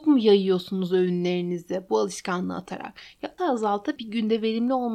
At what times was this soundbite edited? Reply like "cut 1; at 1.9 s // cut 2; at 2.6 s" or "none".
cut 1; at 3.4 s // cut 2; at 4.0 s